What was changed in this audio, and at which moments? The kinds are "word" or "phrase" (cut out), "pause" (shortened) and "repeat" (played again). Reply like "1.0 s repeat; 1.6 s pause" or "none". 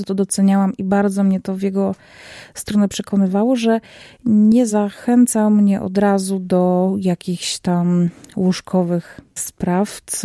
none